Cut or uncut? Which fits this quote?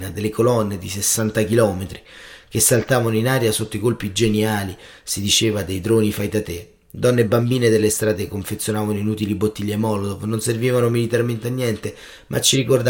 uncut